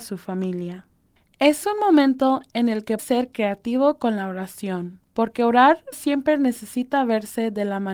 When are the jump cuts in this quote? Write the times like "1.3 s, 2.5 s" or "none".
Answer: 1.2 s, 3.0 s, 5.0 s, 5.9 s